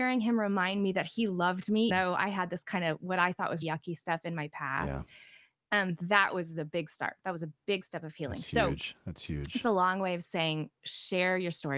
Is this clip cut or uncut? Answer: cut